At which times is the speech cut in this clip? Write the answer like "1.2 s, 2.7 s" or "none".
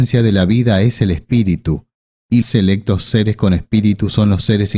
2.4 s